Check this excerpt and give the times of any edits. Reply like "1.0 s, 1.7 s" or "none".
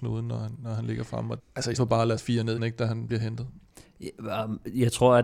1.4 s, 1.8 s, 2.2 s, 2.6 s, 3.1 s